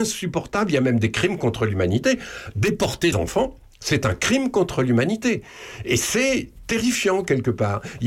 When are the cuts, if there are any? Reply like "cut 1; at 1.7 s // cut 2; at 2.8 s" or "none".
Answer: cut 1; at 3.1 s